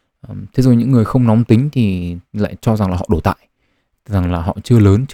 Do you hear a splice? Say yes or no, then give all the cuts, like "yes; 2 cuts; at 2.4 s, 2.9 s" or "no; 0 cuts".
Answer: no; 0 cuts